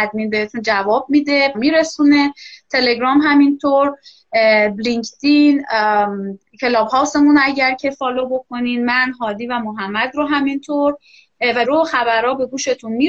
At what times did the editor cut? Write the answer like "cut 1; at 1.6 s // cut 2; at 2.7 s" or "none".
cut 1; at 1.5 s // cut 2; at 11.6 s